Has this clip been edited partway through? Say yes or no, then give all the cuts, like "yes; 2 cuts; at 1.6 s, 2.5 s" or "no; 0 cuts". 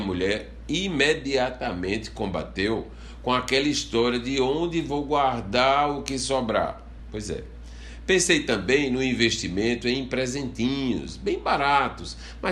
no; 0 cuts